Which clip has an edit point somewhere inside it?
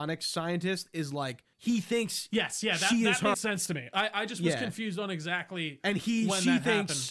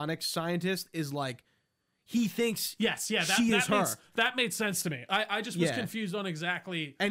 first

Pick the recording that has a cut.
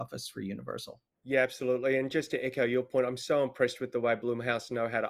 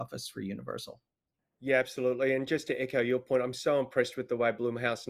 first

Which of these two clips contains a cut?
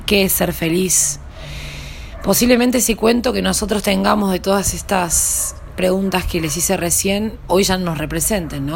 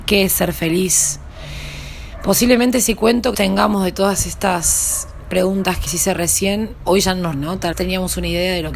second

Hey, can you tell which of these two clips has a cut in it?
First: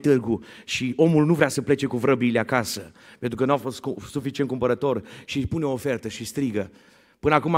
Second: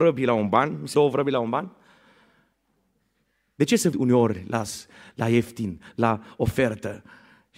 second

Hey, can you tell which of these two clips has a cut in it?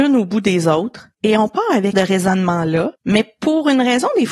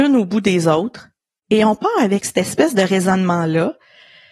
first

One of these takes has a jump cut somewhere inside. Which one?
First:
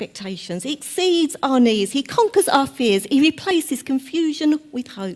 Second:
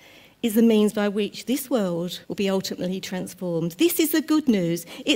second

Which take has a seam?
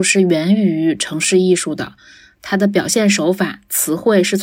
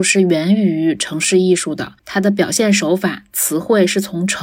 second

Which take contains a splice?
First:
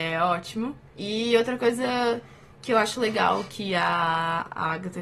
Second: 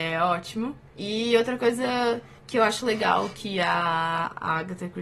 second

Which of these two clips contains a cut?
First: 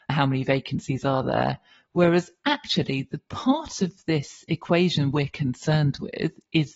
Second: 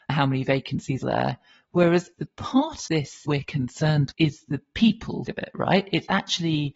second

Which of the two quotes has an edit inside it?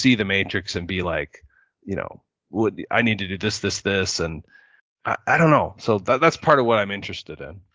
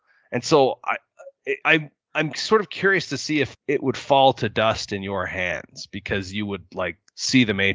second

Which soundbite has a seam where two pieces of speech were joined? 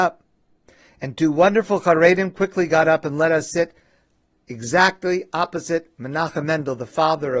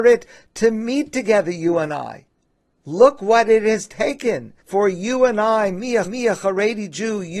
second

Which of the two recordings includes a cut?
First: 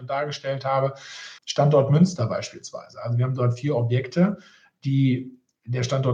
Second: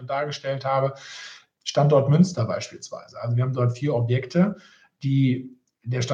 first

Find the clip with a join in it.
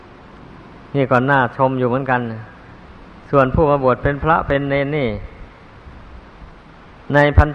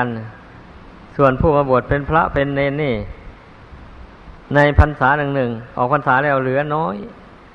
second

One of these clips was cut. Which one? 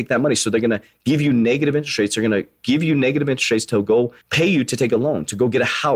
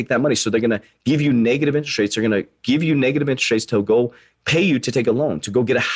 first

